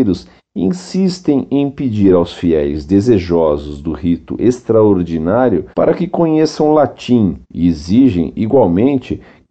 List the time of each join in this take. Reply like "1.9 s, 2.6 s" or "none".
5.7 s, 7.4 s

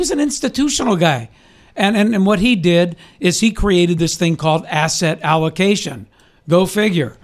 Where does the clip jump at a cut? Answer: none

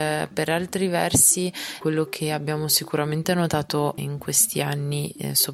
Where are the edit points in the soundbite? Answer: 4.0 s

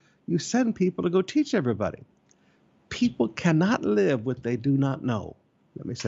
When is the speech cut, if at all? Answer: none

